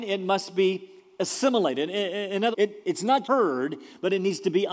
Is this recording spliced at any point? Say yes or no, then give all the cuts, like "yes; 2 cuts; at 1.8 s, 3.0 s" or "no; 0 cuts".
yes; 2 cuts; at 2.5 s, 3.2 s